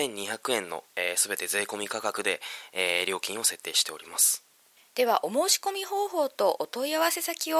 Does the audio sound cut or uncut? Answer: uncut